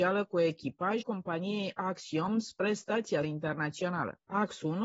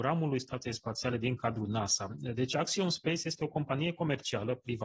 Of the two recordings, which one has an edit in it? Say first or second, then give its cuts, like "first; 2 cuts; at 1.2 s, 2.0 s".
first; 2 cuts; at 1.0 s, 3.2 s